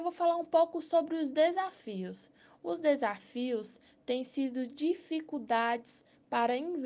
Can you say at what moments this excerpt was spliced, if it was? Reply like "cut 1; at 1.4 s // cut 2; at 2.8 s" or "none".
none